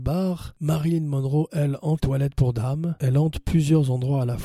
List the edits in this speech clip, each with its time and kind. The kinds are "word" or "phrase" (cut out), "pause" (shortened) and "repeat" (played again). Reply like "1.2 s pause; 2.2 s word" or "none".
2.0 s word